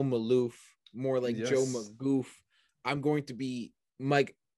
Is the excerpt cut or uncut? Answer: uncut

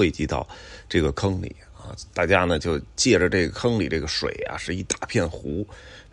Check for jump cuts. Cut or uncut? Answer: uncut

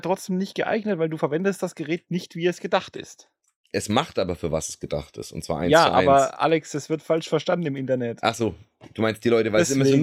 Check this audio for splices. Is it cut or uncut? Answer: uncut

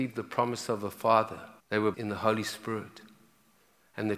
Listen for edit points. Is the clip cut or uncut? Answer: cut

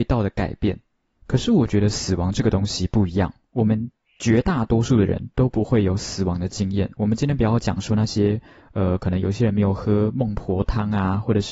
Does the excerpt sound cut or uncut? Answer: uncut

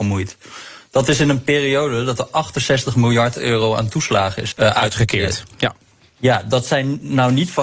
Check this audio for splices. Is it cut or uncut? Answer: cut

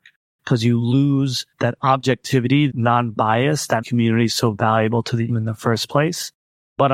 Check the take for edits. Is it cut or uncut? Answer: cut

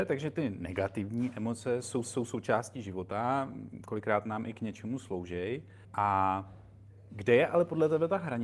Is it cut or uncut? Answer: cut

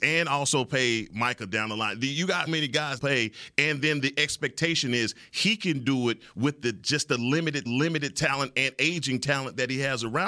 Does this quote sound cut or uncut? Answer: cut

